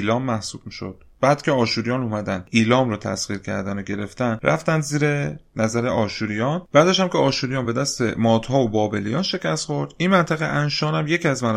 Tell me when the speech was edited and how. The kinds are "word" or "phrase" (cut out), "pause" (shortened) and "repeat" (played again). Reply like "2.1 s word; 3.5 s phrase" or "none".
none

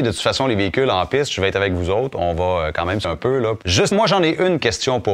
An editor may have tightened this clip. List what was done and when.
3.0 s word; 3.9 s word

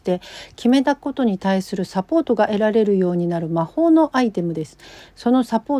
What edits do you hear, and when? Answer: none

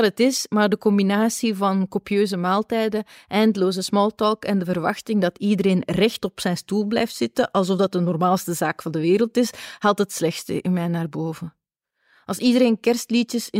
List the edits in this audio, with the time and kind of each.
none

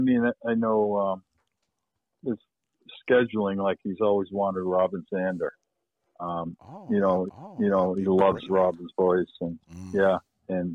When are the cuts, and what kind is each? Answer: 7.3 s repeat

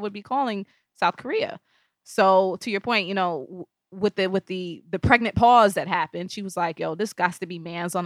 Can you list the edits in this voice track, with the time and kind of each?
none

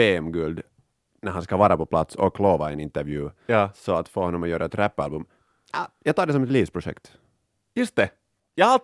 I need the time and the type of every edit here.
none

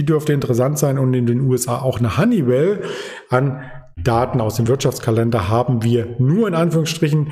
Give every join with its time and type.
none

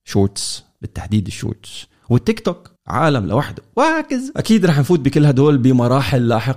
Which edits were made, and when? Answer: 2.8 s pause

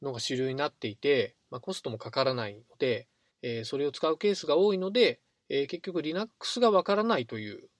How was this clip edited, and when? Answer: 3.3 s pause; 5.3 s pause

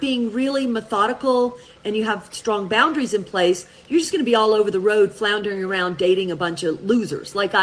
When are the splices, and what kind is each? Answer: none

